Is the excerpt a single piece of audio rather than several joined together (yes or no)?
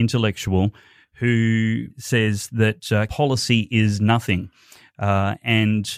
no